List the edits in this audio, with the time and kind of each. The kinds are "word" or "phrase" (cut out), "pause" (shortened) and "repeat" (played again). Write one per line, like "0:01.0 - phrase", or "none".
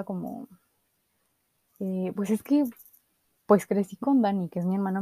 none